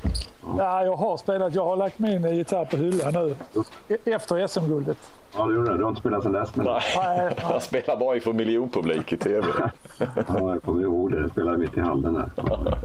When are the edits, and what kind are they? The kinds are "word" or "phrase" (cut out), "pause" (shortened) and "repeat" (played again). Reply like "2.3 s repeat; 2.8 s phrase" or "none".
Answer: none